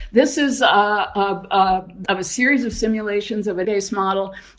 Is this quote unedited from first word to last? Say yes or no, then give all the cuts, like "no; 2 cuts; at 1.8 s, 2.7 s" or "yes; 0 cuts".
no; 2 cuts; at 2.1 s, 3.6 s